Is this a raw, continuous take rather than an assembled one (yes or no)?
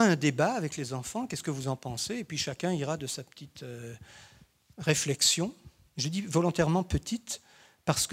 yes